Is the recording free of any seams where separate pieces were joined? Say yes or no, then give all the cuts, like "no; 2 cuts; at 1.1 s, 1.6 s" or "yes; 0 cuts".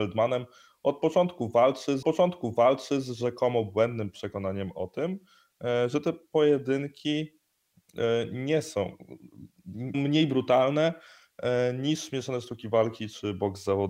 no; 2 cuts; at 2.0 s, 9.9 s